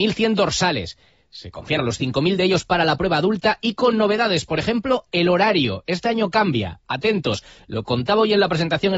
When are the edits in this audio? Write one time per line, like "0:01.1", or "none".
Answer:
0:01.8